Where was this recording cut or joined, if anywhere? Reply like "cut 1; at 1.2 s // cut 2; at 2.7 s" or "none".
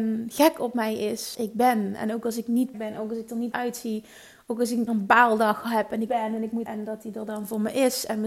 cut 1; at 1.3 s // cut 2; at 2.7 s // cut 3; at 3.5 s // cut 4; at 4.9 s // cut 5; at 6.1 s // cut 6; at 6.7 s